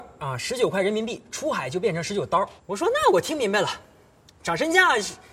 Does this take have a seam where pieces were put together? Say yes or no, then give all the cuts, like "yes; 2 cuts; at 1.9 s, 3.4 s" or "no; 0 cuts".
yes; 1 cut; at 2.6 s